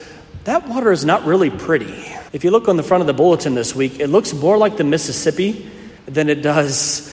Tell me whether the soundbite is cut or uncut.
cut